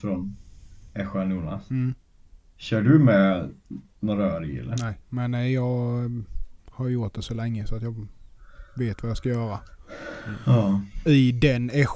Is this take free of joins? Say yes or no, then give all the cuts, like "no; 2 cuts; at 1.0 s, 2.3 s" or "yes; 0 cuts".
no; 2 cuts; at 5.0 s, 6.6 s